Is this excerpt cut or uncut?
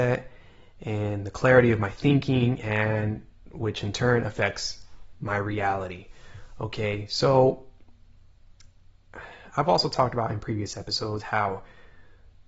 uncut